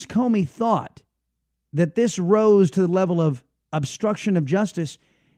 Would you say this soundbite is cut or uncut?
uncut